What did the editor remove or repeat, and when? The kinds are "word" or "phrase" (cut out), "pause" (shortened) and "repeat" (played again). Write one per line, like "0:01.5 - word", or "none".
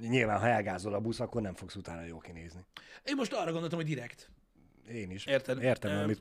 none